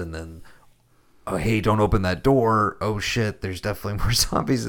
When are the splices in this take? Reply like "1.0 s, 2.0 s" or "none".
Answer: none